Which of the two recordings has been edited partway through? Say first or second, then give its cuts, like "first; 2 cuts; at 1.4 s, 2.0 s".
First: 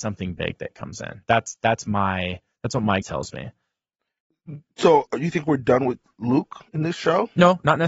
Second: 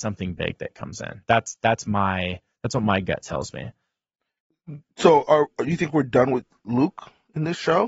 first; 3 cuts; at 3.0 s, 5.1 s, 6.7 s